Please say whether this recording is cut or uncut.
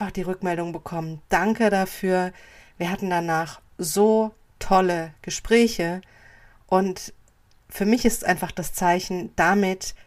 uncut